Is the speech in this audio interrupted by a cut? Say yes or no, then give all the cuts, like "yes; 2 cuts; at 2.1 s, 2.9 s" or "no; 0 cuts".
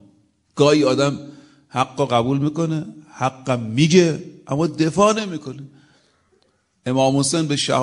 no; 0 cuts